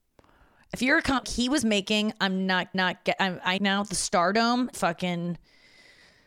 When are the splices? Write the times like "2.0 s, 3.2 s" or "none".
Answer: 1.2 s, 2.7 s, 3.6 s, 4.7 s